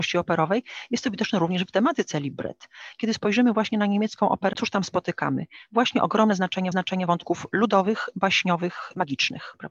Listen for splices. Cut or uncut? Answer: cut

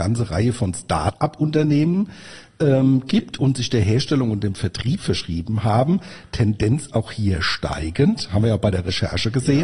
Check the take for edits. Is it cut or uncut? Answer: uncut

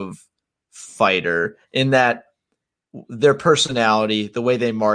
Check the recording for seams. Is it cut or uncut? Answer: uncut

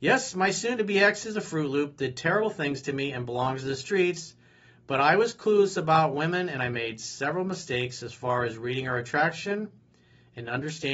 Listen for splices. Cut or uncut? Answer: uncut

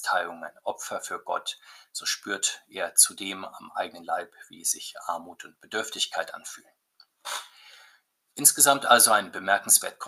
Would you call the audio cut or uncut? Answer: uncut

